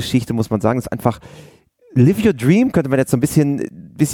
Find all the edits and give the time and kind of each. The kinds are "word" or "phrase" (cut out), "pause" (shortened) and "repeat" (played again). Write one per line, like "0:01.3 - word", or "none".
none